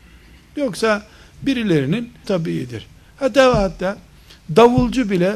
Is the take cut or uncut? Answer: cut